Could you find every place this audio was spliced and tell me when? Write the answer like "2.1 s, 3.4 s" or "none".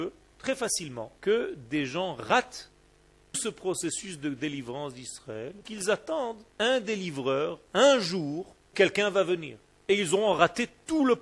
1.2 s, 3.3 s, 5.7 s, 6.5 s, 8.7 s

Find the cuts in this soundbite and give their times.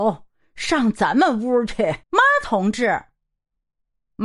2.0 s

